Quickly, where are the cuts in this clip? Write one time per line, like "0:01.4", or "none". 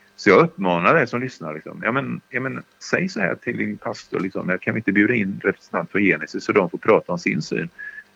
none